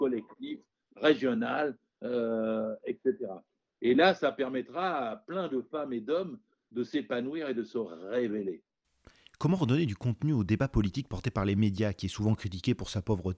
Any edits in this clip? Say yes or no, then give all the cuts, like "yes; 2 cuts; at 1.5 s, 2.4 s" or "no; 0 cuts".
no; 0 cuts